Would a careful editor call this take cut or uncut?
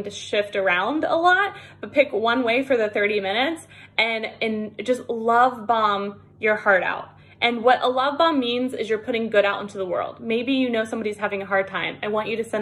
uncut